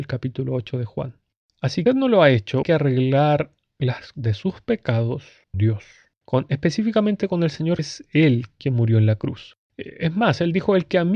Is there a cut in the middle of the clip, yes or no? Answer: yes